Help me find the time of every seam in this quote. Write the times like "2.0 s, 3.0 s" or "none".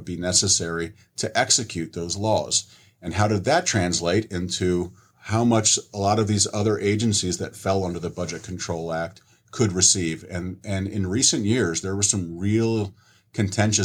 none